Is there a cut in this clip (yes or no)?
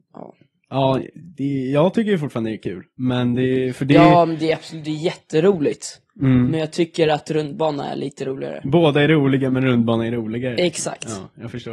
no